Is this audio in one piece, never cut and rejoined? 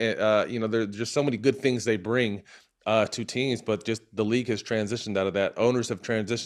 yes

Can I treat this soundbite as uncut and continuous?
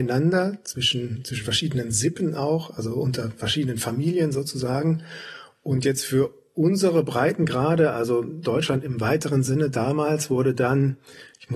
yes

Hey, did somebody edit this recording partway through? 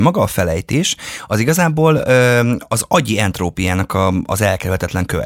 no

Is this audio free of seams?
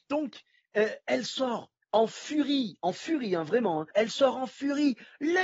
no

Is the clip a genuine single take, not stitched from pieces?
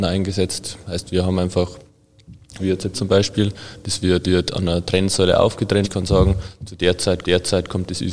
no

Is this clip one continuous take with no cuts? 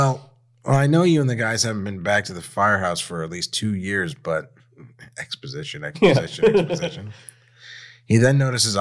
yes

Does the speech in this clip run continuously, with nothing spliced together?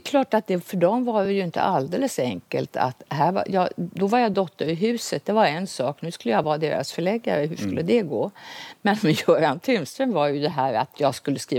yes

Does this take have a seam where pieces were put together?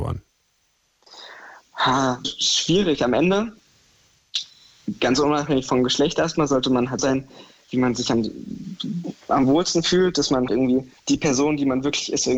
yes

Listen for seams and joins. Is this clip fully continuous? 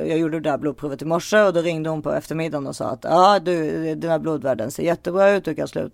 yes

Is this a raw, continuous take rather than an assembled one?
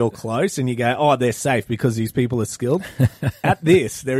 yes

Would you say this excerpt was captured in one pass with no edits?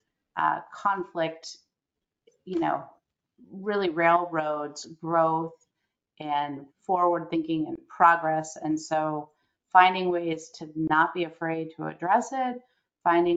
yes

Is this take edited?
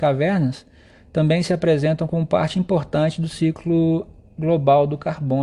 no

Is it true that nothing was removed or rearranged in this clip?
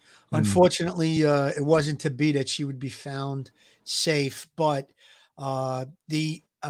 yes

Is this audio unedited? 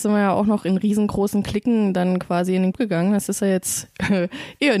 no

